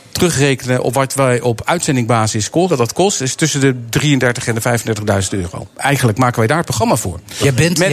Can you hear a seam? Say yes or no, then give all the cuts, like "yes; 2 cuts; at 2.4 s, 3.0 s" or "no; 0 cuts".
yes; 1 cut; at 2.7 s